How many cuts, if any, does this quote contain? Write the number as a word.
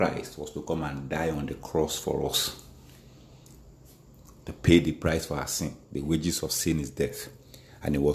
zero